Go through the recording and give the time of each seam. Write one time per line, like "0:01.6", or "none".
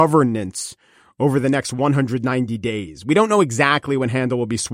none